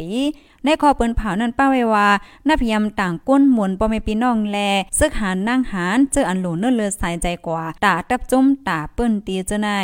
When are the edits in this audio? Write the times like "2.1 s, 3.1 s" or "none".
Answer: 4.9 s, 7.8 s